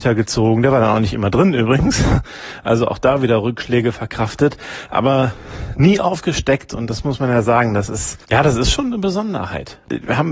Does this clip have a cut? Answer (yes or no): yes